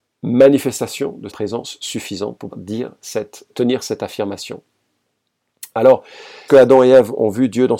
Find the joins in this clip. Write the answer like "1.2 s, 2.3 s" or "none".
1.3 s, 2.5 s, 3.5 s, 6.5 s